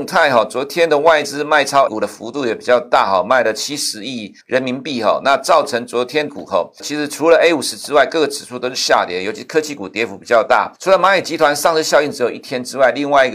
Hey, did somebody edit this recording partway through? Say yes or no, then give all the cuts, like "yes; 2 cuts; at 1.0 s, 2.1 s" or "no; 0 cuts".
yes; 5 cuts; at 1.9 s, 4.4 s, 6.3 s, 6.8 s, 10.8 s